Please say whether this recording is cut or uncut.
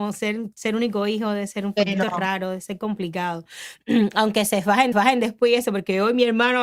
cut